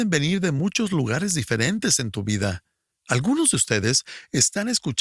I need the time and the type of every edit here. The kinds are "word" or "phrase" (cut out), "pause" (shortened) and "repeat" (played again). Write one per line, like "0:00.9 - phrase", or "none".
none